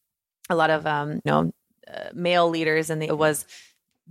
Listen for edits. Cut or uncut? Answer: cut